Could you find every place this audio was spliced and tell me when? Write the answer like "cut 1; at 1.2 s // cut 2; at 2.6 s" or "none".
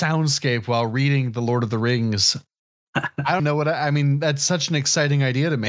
cut 1; at 2.6 s // cut 2; at 3.4 s